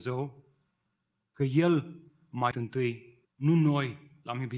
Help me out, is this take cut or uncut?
cut